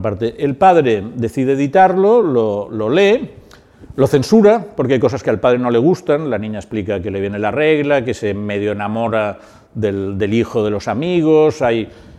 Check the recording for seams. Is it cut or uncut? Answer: uncut